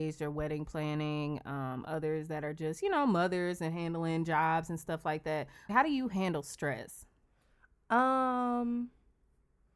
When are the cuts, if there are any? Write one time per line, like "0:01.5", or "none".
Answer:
0:05.7